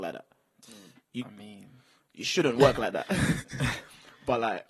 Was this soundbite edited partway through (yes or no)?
no